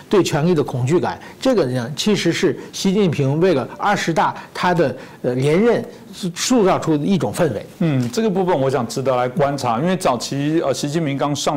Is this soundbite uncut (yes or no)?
no